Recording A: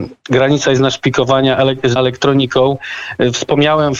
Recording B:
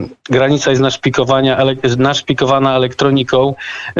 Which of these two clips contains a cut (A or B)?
A